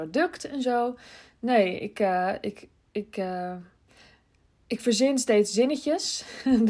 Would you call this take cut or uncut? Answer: uncut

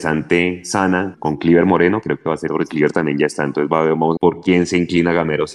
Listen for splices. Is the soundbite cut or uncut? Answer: cut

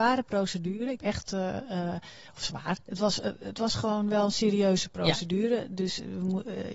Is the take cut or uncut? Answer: cut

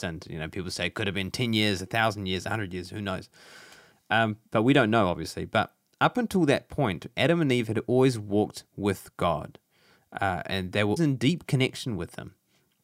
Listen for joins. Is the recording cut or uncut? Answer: cut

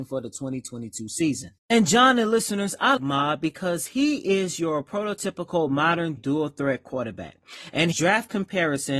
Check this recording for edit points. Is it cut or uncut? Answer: cut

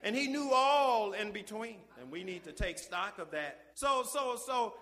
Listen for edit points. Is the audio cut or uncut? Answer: cut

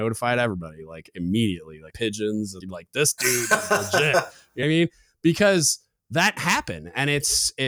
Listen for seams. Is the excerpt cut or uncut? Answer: cut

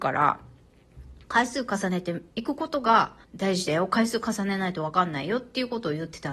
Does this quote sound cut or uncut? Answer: cut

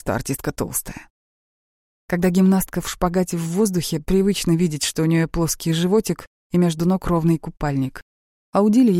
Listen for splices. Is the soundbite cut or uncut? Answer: uncut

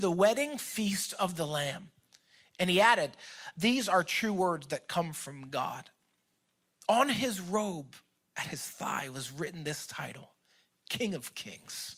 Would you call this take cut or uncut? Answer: uncut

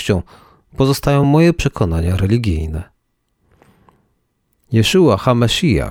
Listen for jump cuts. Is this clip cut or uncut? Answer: uncut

